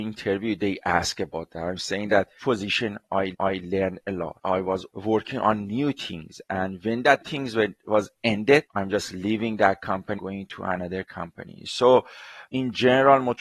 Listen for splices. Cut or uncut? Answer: cut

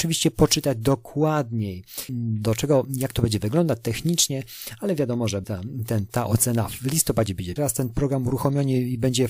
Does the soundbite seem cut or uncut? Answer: cut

